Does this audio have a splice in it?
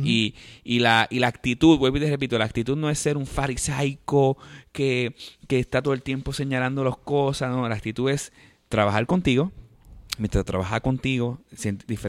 no; 0 cuts

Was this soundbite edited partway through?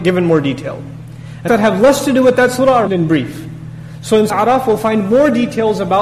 yes; 3 cuts; at 1.5 s, 2.9 s, 4.3 s

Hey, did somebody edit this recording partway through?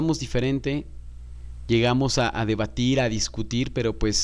no; 0 cuts

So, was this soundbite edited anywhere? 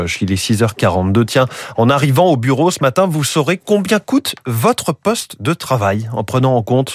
no; 0 cuts

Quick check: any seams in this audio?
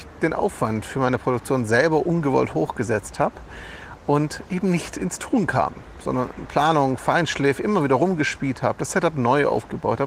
no; 0 cuts

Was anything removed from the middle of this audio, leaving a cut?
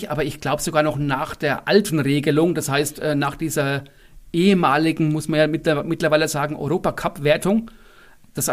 no; 0 cuts

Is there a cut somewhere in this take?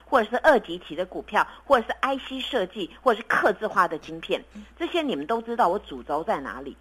no; 0 cuts

